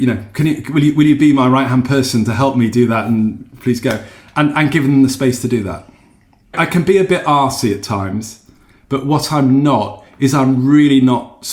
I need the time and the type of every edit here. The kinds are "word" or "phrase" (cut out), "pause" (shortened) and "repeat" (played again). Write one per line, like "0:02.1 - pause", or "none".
none